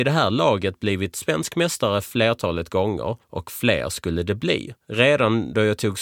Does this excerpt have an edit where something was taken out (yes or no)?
yes